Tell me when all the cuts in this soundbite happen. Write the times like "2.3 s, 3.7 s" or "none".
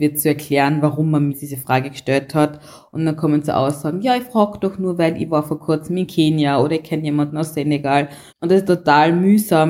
1.3 s, 8.3 s, 8.7 s